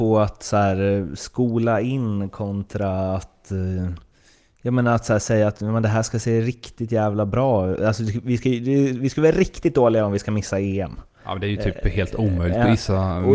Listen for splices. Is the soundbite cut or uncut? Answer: uncut